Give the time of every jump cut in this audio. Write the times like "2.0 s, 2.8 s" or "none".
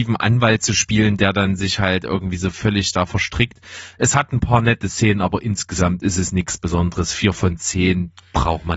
none